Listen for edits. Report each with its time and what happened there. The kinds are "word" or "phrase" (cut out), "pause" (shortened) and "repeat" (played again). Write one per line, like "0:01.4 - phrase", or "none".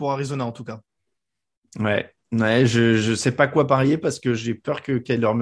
none